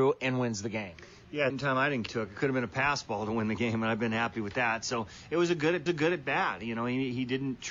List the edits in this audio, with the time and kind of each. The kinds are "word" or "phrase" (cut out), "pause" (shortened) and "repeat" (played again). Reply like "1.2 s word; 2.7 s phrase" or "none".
1.5 s phrase; 2.1 s phrase; 5.9 s repeat